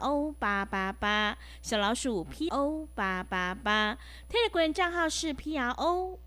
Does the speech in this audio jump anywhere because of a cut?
yes; 1 cut; at 2.5 s

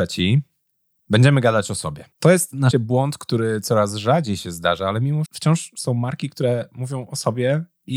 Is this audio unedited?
no; 3 cuts; at 2.1 s, 2.7 s, 5.3 s

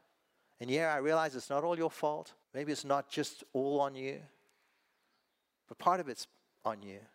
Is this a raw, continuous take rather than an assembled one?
no; 1 cut; at 2.4 s

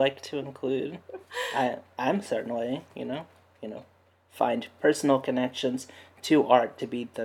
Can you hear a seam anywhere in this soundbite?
no; 0 cuts

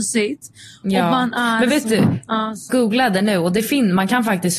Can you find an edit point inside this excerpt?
yes; 1 cut; at 2.7 s

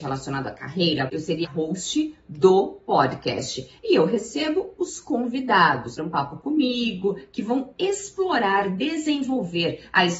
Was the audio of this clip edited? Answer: yes; 3 cuts; at 1.1 s, 1.4 s, 6.0 s

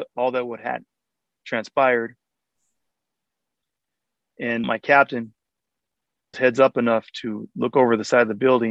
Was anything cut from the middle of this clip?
yes; 2 cuts; at 4.6 s, 6.3 s

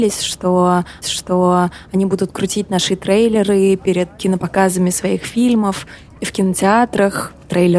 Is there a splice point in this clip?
yes; 1 cut; at 1.0 s

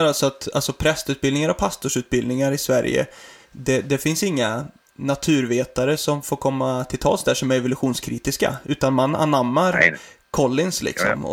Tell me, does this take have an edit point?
no; 0 cuts

